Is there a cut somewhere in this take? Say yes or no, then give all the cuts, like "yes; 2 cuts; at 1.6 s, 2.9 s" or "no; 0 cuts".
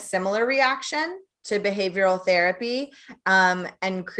yes; 1 cut; at 1.3 s